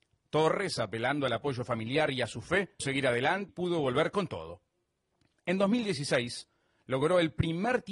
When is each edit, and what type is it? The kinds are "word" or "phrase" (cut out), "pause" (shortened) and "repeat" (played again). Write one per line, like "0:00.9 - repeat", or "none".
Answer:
0:02.8 - word
0:03.5 - word